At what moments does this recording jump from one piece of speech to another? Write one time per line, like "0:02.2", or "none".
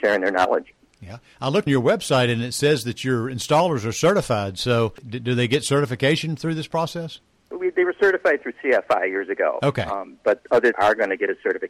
0:01.7
0:05.0
0:10.7